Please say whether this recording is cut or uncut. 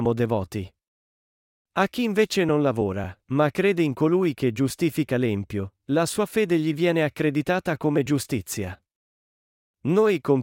uncut